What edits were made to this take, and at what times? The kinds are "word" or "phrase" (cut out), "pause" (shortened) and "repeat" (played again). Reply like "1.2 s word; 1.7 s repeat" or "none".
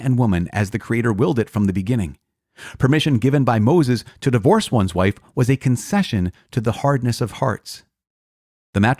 none